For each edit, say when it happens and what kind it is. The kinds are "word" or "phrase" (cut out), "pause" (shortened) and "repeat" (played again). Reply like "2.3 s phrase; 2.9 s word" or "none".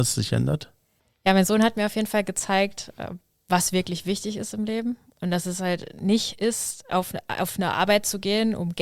none